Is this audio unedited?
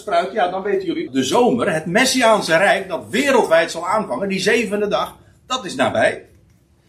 no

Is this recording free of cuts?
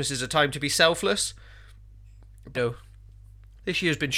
no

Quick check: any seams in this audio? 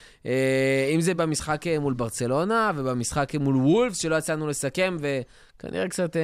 no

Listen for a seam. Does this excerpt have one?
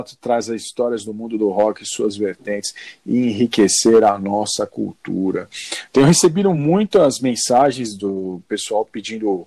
no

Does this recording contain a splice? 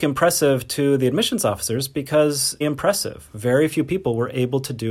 yes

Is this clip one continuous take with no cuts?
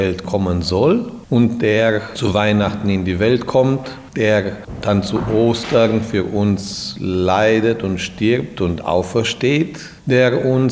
yes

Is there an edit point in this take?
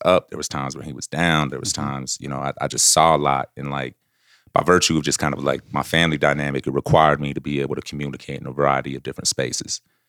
no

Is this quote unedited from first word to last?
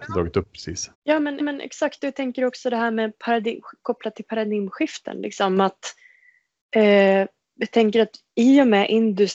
no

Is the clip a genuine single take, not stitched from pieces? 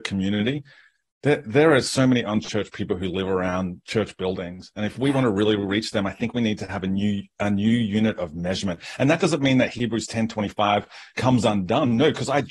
yes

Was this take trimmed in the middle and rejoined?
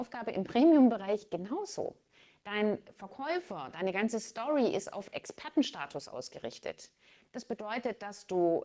no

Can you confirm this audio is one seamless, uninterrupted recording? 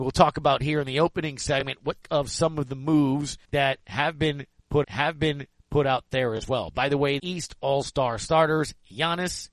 no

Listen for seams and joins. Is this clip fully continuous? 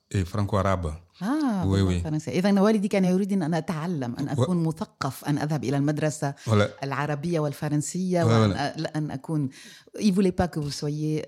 yes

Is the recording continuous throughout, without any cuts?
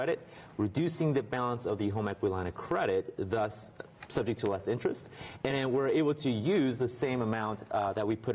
yes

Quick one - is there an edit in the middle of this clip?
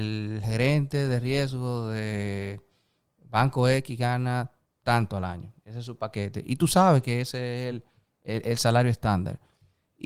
no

